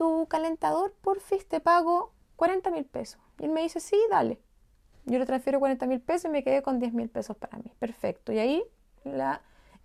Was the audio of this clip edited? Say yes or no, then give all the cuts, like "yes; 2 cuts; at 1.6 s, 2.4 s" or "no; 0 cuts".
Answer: no; 0 cuts